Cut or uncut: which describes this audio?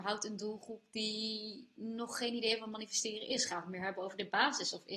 uncut